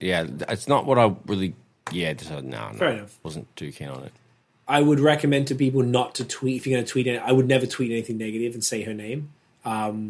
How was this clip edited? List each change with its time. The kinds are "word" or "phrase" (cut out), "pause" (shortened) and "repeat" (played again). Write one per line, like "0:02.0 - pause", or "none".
none

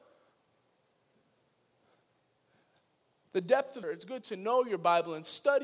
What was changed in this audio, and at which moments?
0:03.8 - word

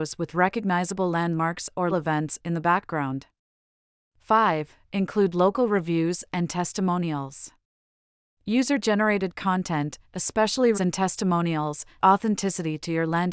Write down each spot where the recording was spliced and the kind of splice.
0:01.9 - word
0:10.7 - word
0:12.0 - word

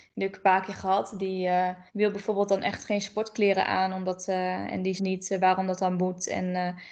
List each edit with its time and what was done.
0:01.9 - pause
0:05.0 - phrase

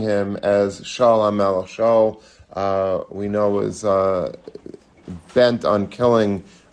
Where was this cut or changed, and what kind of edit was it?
none

